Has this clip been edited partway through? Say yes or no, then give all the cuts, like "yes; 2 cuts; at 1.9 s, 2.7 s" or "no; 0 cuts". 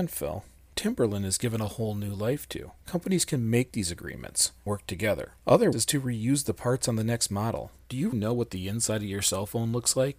yes; 3 cuts; at 4.7 s, 5.7 s, 8.1 s